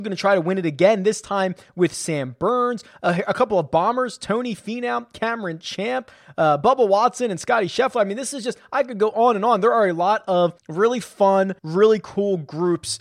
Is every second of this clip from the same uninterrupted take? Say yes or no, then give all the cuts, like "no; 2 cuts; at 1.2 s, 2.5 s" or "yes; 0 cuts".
no; 2 cuts; at 10.6 s, 11.6 s